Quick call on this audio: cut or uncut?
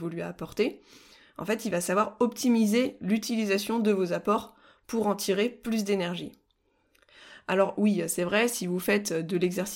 uncut